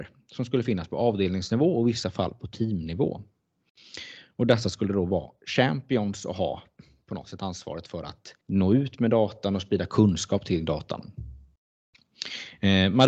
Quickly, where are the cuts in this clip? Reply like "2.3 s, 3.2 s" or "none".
8.4 s